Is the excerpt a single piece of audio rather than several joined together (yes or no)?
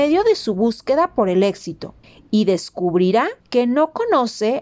no